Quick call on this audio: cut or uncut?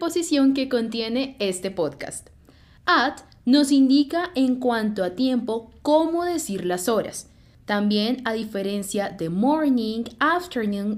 uncut